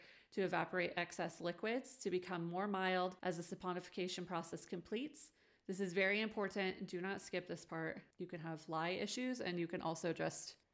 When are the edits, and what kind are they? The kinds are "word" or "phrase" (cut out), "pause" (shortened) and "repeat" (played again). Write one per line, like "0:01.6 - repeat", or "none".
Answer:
0:03.2 - pause